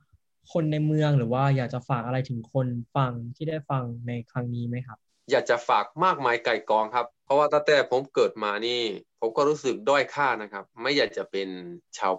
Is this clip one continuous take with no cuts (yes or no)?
no